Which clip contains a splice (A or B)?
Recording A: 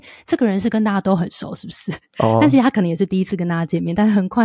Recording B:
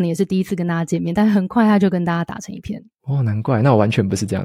B